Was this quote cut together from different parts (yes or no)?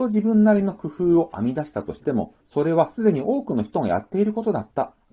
yes